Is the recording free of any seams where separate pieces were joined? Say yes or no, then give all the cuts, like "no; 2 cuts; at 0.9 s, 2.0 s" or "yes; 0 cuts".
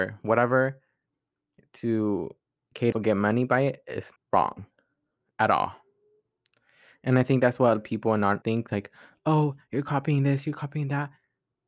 no; 4 cuts; at 2.9 s, 4.2 s, 7.8 s, 8.4 s